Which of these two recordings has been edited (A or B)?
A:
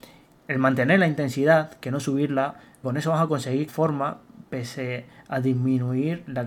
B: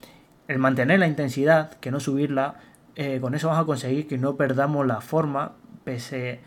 A